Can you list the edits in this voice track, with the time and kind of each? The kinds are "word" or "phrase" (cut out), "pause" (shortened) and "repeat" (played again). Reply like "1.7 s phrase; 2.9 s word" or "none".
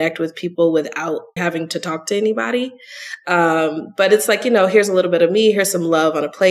1.4 s word